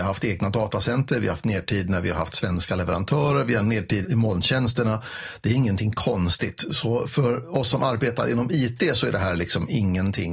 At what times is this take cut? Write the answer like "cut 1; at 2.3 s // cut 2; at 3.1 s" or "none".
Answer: cut 1; at 4.0 s

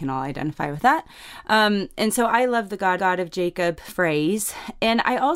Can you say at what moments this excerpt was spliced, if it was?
cut 1; at 3.0 s

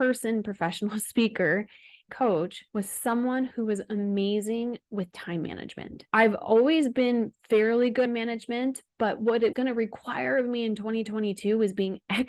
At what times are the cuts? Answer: cut 1; at 2.1 s // cut 2; at 2.7 s // cut 3; at 8.1 s // cut 4; at 9.5 s

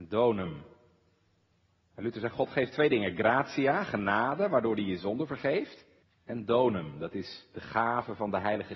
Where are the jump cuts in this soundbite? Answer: cut 1; at 6.0 s

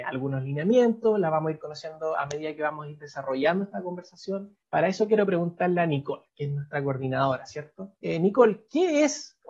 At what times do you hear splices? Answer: cut 1; at 4.6 s // cut 2; at 8.0 s

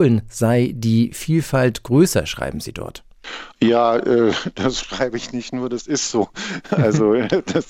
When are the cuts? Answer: cut 1; at 3.5 s

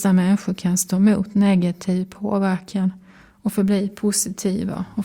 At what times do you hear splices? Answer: none

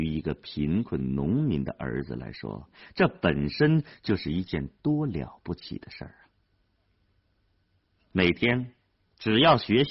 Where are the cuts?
none

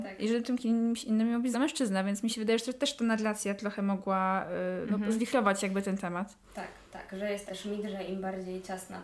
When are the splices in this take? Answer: cut 1; at 1.5 s // cut 2; at 7.5 s

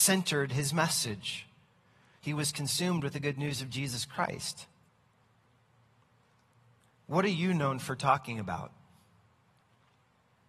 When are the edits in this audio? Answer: none

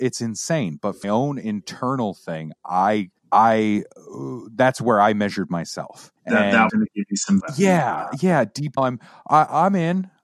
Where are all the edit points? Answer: cut 1; at 1.0 s // cut 2; at 3.2 s // cut 3; at 6.2 s // cut 4; at 6.7 s // cut 5; at 7.4 s // cut 6; at 8.8 s

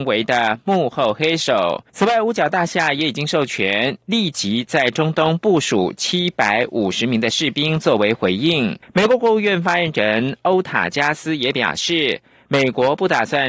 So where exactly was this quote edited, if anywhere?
cut 1; at 1.9 s // cut 2; at 8.8 s

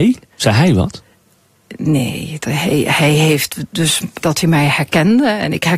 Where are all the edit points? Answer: cut 1; at 4.2 s

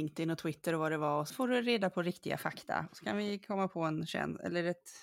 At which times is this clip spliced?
cut 1; at 1.3 s

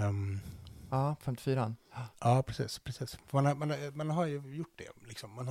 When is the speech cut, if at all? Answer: cut 1; at 2.1 s // cut 2; at 3.2 s

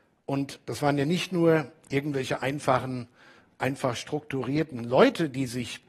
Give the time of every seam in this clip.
none

